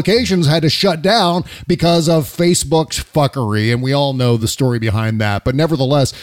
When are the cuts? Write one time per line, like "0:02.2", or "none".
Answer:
none